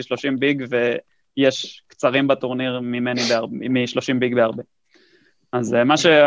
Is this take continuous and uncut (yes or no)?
yes